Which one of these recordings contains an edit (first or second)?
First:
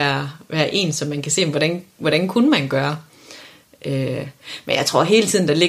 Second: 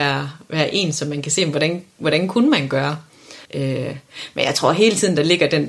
second